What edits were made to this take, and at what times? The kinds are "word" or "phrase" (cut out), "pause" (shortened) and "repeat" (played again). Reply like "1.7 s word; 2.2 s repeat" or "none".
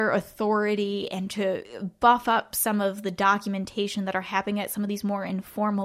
none